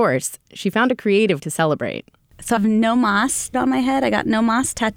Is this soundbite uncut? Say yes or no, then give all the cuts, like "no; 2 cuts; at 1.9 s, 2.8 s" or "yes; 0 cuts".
no; 3 cuts; at 1.4 s, 2.6 s, 3.5 s